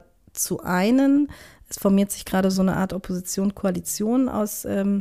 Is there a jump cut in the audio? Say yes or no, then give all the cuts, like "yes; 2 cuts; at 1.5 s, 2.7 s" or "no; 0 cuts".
no; 0 cuts